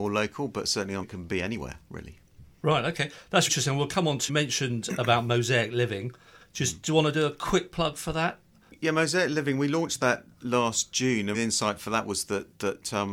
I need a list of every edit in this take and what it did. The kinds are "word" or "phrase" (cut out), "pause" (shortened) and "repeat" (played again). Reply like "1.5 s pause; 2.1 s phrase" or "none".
1.0 s word; 3.5 s word; 4.3 s word; 11.3 s word